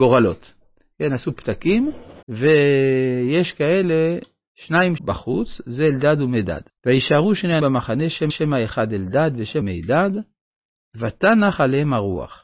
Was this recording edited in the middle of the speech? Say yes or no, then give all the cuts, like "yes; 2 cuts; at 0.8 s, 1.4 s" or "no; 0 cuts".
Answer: yes; 6 cuts; at 2.2 s, 5.0 s, 6.7 s, 7.6 s, 8.3 s, 9.6 s